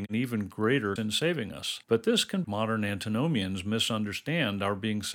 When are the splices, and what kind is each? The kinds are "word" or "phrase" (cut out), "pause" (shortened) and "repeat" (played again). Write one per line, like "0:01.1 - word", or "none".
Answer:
0:01.0 - word
0:01.8 - pause
0:02.4 - phrase